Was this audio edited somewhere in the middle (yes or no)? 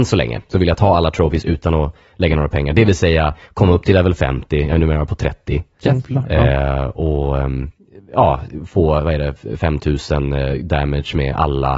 no